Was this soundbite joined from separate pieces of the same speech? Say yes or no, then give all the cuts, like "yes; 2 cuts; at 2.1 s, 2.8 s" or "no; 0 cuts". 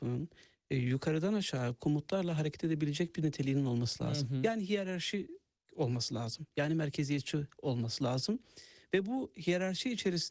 no; 0 cuts